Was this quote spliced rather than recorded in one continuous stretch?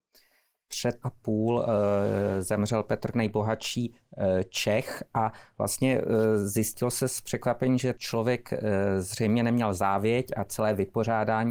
yes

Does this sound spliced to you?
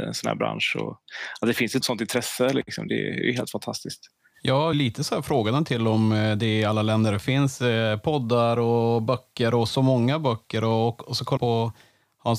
yes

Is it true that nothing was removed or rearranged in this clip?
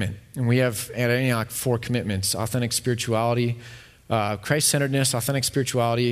yes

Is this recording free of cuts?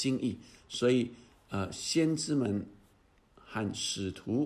yes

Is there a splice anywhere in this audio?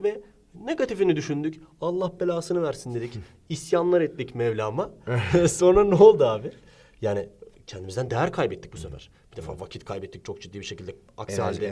no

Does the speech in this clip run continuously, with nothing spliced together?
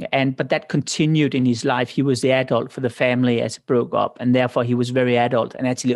yes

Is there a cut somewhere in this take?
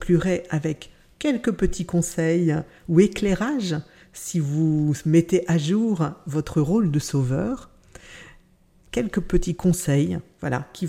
no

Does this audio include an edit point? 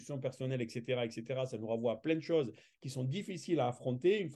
no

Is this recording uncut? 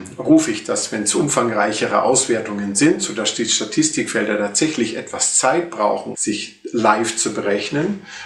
no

